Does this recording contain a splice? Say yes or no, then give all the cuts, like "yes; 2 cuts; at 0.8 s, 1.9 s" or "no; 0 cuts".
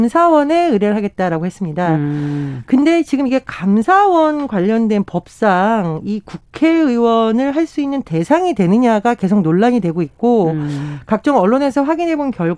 no; 0 cuts